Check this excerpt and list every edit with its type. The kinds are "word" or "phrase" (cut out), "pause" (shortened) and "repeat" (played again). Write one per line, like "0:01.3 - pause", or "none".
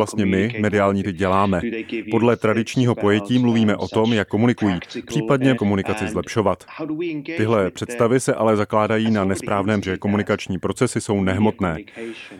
0:01.0 - word
0:04.3 - word
0:05.6 - word
0:09.8 - word

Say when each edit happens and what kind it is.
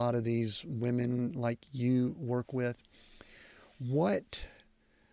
none

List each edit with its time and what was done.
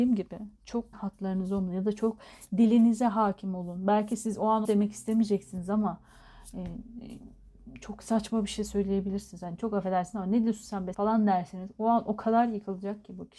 0:00.9 - word
0:04.6 - word
0:10.9 - word

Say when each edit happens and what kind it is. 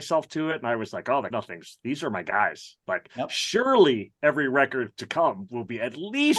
0:01.3 - word

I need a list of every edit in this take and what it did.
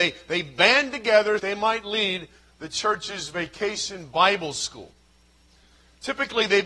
0:01.4 - phrase

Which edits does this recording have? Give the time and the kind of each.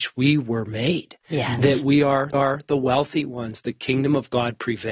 0:02.3 - repeat

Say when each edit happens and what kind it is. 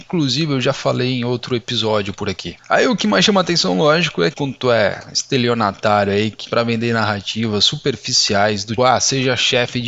0:04.3 - phrase
0:06.4 - phrase
0:08.8 - word

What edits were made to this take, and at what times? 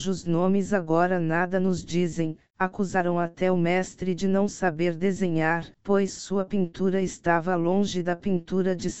0:05.7 - pause

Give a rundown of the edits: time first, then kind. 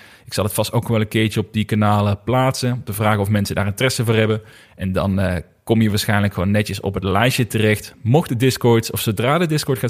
none

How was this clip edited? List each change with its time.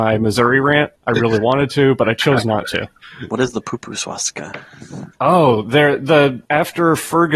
0:01.0 - pause
0:05.1 - pause
0:06.5 - pause

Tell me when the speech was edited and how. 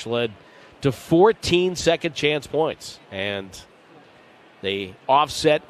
0:03.0 - pause

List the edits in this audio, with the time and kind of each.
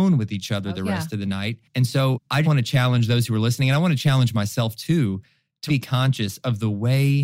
0:02.4 - word
0:05.7 - word

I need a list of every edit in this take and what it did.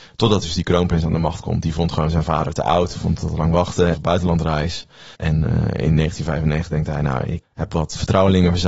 0:03.9 - phrase
0:05.1 - pause
0:07.4 - word

